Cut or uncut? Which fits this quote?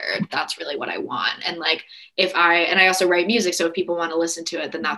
uncut